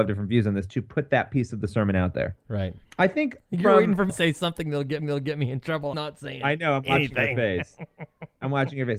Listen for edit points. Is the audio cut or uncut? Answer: cut